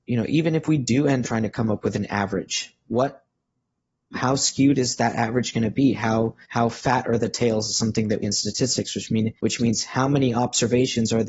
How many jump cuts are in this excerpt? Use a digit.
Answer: 5